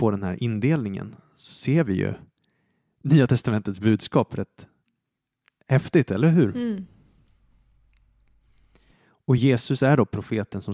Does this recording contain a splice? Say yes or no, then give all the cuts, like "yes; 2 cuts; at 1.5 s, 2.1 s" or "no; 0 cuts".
no; 0 cuts